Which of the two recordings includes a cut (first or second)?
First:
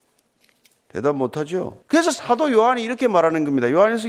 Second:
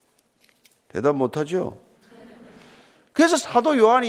first